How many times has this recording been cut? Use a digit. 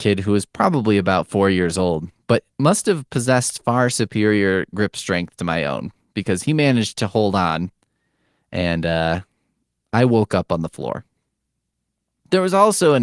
0